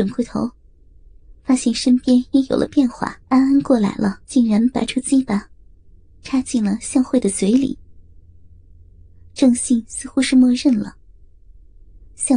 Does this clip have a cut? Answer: yes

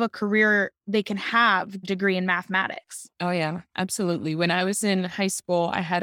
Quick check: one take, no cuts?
no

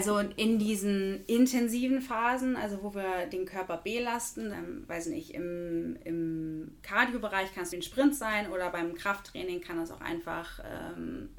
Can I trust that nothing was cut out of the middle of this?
no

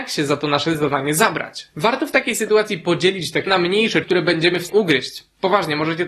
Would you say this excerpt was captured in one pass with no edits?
no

